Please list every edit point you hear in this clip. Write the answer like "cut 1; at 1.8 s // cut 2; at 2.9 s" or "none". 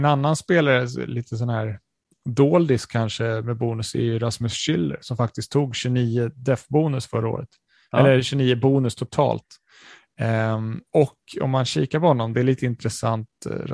cut 1; at 10.9 s